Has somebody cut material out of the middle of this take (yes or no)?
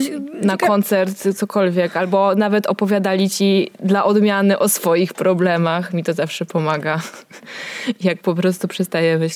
no